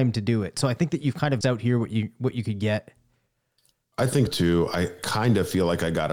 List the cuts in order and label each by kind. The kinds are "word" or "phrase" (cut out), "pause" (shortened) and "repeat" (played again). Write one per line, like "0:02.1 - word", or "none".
0:01.4 - word
0:04.3 - word
0:05.0 - word